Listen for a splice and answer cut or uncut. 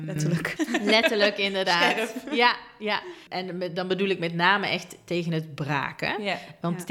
uncut